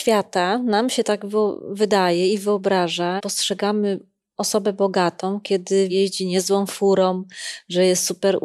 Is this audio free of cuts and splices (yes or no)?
no